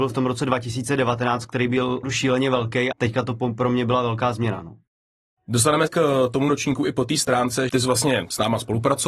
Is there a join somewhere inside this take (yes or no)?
yes